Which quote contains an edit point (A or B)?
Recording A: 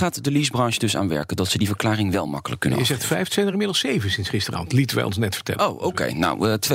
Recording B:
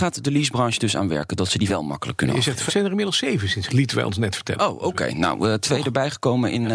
B